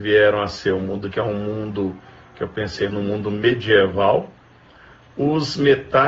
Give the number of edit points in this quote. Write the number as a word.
two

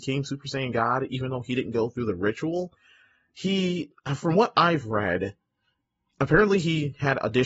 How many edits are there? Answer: zero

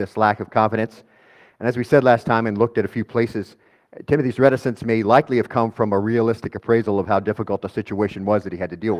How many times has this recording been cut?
zero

